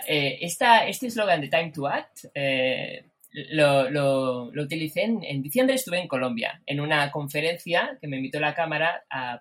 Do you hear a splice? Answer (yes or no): no